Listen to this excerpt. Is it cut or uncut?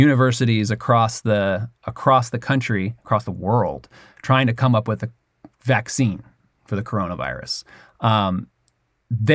uncut